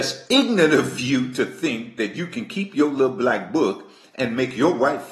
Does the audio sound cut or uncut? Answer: uncut